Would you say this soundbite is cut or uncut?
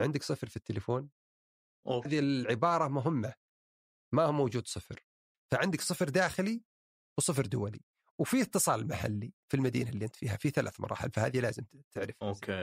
cut